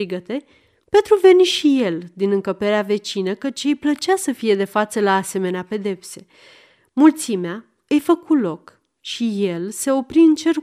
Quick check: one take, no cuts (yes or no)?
yes